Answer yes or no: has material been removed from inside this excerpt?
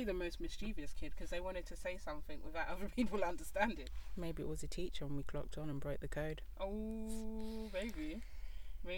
no